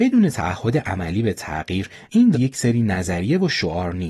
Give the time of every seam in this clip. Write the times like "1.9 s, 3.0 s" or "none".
2.3 s